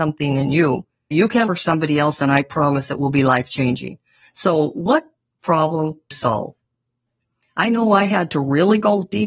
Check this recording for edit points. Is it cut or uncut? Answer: cut